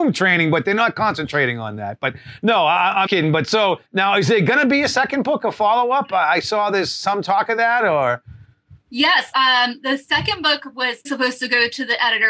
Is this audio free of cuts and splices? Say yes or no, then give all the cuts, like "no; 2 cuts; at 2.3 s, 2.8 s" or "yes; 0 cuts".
no; 4 cuts; at 3.1 s, 3.8 s, 9.3 s, 11.1 s